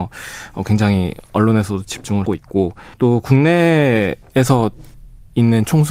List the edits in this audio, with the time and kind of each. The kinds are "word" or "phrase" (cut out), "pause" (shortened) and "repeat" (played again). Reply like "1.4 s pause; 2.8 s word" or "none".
1.3 s word; 2.3 s word; 2.9 s pause